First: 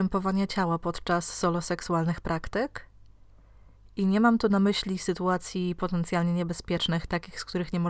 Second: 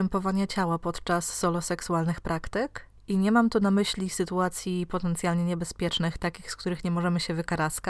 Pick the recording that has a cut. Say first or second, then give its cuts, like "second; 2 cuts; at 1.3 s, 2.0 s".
second; 1 cut; at 3.0 s